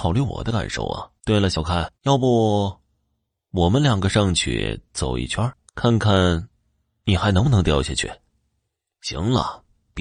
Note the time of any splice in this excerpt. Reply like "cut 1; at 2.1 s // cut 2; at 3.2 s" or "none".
cut 1; at 1.2 s // cut 2; at 1.9 s // cut 3; at 5.7 s